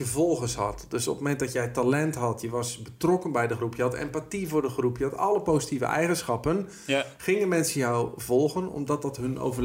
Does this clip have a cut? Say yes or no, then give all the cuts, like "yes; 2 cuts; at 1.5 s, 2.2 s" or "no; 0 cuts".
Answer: no; 0 cuts